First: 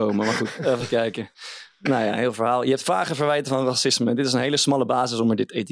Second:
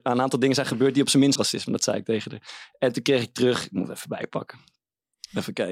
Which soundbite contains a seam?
second; 1 cut; at 1.4 s

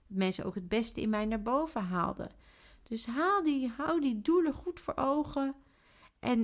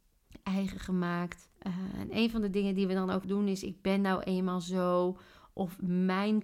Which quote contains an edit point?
second; 2 cuts; at 1.5 s, 3.2 s

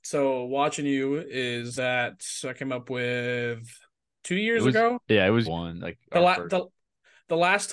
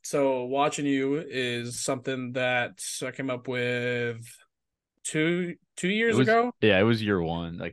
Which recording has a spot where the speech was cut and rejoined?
first; 3 cuts; at 1.7 s, 4.1 s, 5.5 s

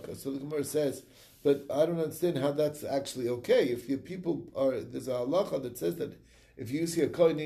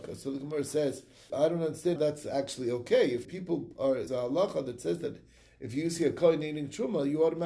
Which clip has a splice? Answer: second; 4 cuts; at 1.3 s, 2.0 s, 3.2 s, 4.1 s

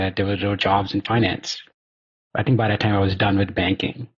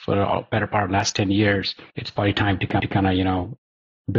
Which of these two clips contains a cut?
second; 2 cuts; at 1.9 s, 2.8 s

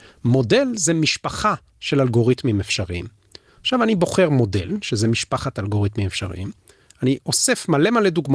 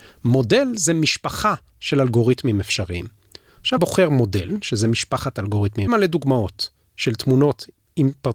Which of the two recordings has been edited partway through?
second; 2 cuts; at 3.8 s, 5.9 s

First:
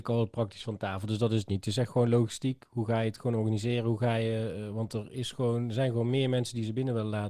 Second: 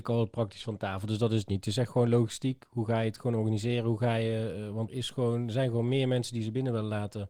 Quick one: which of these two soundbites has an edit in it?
second; 1 cut; at 4.9 s

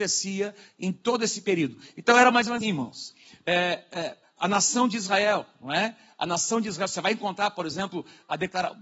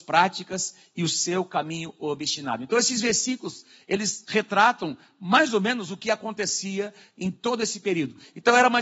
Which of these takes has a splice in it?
first; 2 cuts; at 2.6 s, 4.4 s

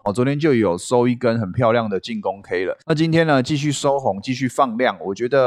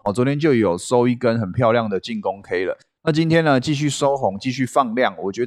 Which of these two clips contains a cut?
first; 1 cut; at 2.8 s

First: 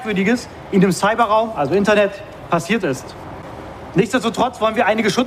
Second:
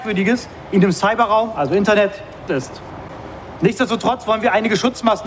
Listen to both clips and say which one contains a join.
second; 1 cut; at 2.5 s

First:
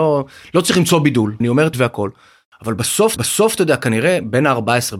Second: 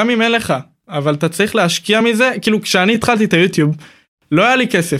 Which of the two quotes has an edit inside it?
first; 3 cuts; at 1.4 s, 1.7 s, 3.2 s

